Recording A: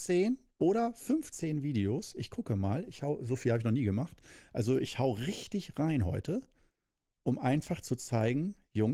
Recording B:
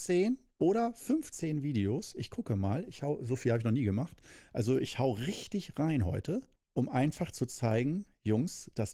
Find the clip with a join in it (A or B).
B